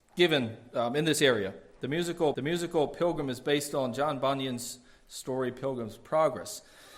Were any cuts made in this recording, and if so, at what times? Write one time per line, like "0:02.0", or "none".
0:02.3